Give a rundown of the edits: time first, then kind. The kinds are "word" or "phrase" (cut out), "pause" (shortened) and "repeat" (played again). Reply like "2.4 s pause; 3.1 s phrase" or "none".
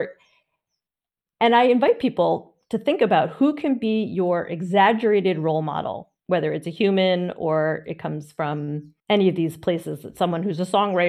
6.2 s pause; 9.0 s pause